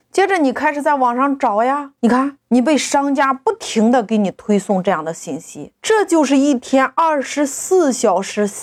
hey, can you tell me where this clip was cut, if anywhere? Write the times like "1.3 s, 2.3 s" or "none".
2.0 s, 2.4 s, 5.8 s